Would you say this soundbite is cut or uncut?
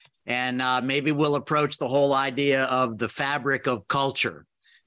uncut